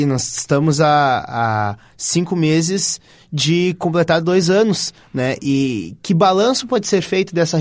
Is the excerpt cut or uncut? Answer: uncut